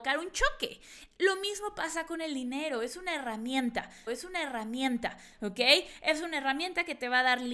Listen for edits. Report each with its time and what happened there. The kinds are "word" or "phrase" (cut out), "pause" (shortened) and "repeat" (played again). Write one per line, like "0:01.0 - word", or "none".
0:04.1 - repeat